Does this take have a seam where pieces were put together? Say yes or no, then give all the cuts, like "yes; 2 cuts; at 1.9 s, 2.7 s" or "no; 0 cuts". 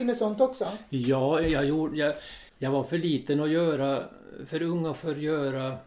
yes; 1 cut; at 2.5 s